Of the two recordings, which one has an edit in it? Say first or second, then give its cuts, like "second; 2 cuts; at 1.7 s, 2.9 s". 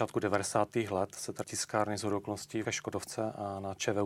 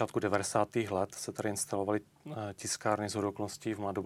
first; 2 cuts; at 1.4 s, 2.6 s